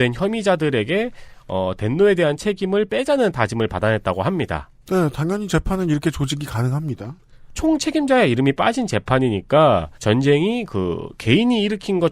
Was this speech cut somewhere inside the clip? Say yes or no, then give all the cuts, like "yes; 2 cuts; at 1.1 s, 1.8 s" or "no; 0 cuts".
yes; 1 cut; at 9.9 s